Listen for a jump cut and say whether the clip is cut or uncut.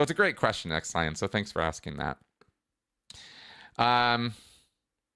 uncut